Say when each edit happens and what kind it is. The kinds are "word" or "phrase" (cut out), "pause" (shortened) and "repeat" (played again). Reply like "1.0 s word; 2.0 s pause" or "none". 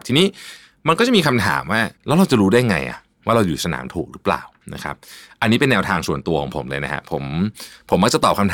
2.0 s pause